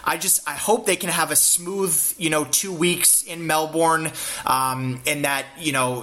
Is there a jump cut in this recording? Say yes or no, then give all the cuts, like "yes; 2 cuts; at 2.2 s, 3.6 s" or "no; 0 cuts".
no; 0 cuts